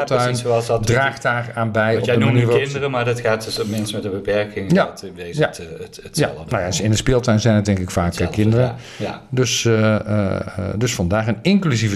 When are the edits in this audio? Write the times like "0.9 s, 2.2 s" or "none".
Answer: none